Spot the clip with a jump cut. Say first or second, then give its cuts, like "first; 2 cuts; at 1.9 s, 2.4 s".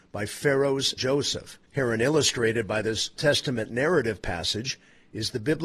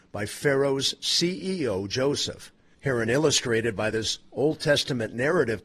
first; 3 cuts; at 1.0 s, 1.6 s, 3.2 s